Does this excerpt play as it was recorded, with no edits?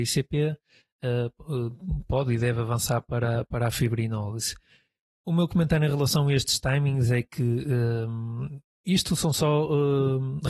yes; 0 cuts

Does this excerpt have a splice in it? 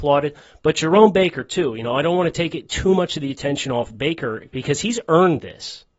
no; 0 cuts

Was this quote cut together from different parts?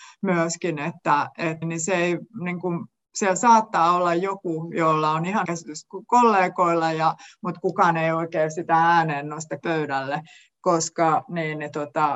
yes; 3 cuts; at 1.6 s, 5.4 s, 9.6 s

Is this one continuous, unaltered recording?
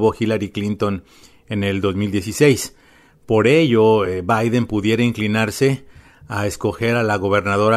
yes; 0 cuts

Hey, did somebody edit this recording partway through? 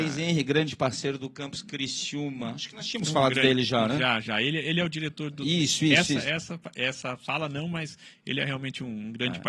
no; 0 cuts

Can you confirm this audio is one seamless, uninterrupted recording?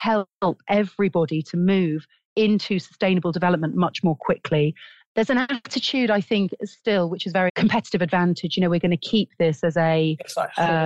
no; 1 cut; at 7.5 s

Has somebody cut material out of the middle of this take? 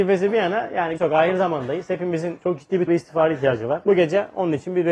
yes; 2 cuts; at 1.0 s, 2.9 s

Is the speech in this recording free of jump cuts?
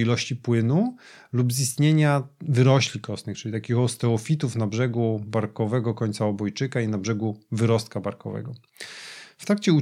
yes; 0 cuts

